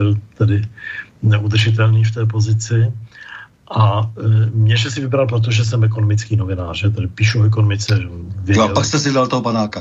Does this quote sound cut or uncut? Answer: uncut